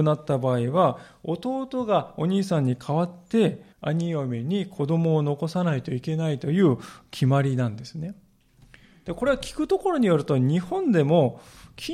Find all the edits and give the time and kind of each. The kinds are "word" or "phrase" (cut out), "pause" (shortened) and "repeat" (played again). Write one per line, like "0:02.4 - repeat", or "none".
0:03.7 - pause

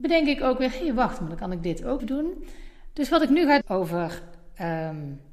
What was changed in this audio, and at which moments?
0:02.0 - word
0:03.6 - phrase

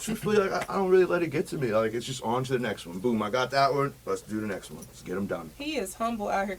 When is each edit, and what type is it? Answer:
0:05.5 - pause

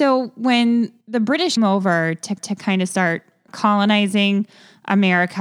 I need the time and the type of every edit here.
0:01.0 - pause
0:01.6 - word
0:02.4 - repeat
0:03.5 - word

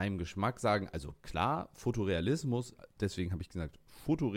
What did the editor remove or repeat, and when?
none

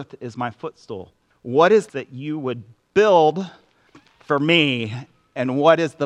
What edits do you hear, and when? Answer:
0:01.3 - pause
0:01.9 - word
0:03.9 - pause

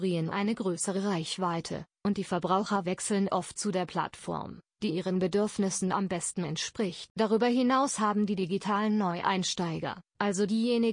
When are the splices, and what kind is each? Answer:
none

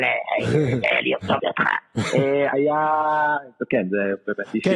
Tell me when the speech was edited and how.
0:01.4 - phrase

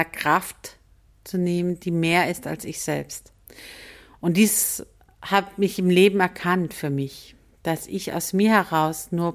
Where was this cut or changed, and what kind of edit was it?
none

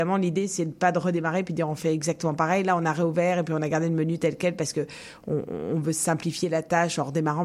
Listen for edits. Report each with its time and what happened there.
none

